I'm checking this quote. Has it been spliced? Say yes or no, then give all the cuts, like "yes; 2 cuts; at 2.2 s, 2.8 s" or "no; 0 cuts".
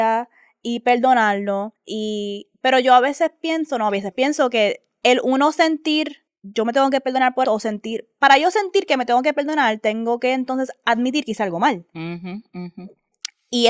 yes; 5 cuts; at 1.8 s, 4.1 s, 6.3 s, 7.4 s, 11.9 s